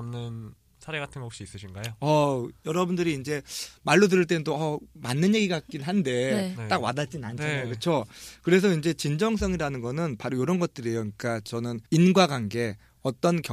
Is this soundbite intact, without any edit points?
no; 1 cut; at 11.9 s

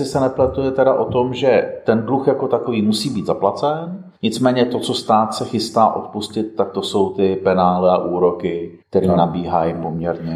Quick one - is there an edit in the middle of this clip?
yes; 2 cuts; at 4.2 s, 8.8 s

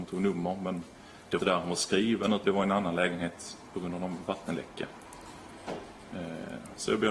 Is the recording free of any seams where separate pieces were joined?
no; 2 cuts; at 1.4 s, 2.4 s

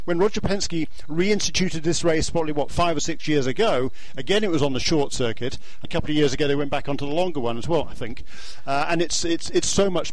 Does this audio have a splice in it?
yes; 1 cut; at 5.8 s

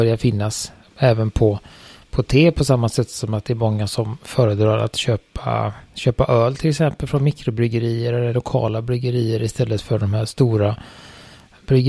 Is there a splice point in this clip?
no; 0 cuts

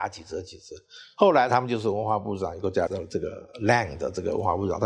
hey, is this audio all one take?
no; 1 cut; at 2.9 s

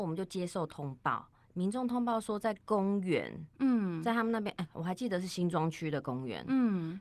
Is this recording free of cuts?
yes; 0 cuts

